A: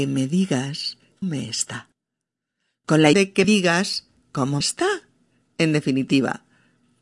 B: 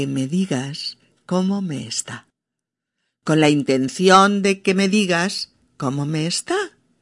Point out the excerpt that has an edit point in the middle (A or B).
A